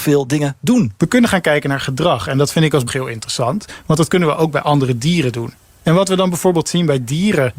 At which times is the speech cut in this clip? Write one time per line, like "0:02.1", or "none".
0:01.0
0:02.9

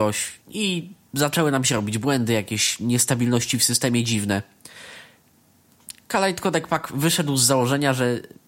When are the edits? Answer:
none

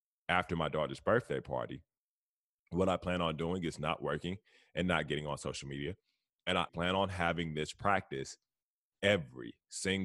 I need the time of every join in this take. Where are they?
0:06.7

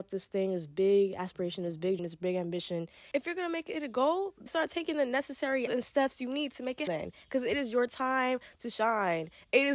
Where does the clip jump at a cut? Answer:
0:02.0
0:04.5
0:05.7
0:06.9

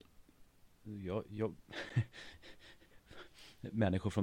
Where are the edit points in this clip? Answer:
0:01.2

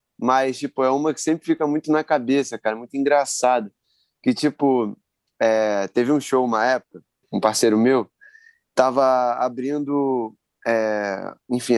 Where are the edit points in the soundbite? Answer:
0:07.2

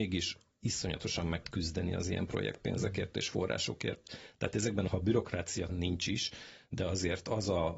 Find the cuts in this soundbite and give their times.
0:01.4
0:04.9
0:05.7

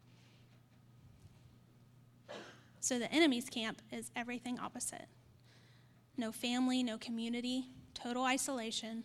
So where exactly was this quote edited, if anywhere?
none

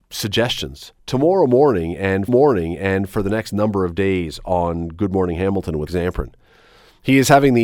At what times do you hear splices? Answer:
0:02.3
0:05.9

